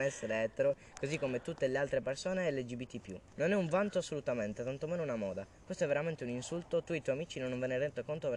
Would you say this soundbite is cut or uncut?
cut